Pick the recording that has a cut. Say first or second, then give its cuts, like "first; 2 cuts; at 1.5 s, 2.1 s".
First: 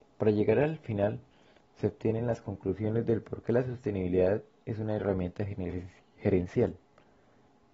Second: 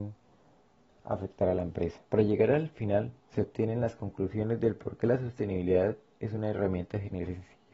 second; 2 cuts; at 2.1 s, 3.2 s